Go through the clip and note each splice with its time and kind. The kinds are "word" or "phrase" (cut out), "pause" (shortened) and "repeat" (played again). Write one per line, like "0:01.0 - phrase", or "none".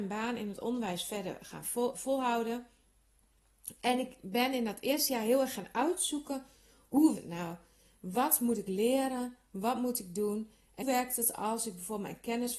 0:01.9 - word
0:07.2 - word
0:10.8 - word